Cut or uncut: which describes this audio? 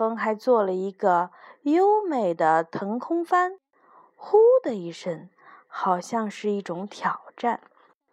uncut